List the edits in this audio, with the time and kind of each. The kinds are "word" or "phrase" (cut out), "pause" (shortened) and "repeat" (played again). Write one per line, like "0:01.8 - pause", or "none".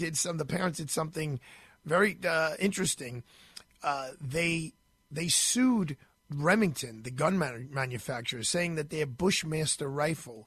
none